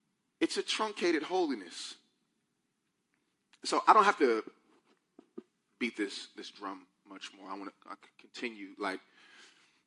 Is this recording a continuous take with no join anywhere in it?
yes; 0 cuts

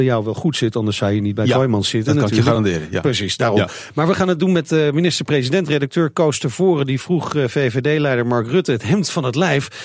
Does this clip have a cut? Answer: no; 0 cuts

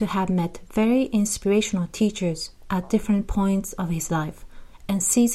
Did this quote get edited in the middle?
no; 0 cuts

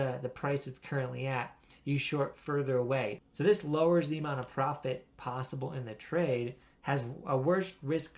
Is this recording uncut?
yes; 0 cuts

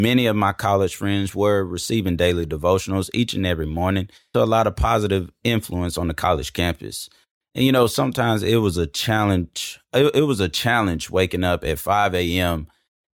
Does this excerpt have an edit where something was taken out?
yes; 1 cut; at 4.3 s

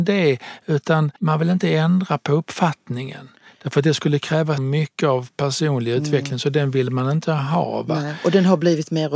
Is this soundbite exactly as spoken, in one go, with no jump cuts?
no; 2 cuts; at 1.2 s, 4.6 s

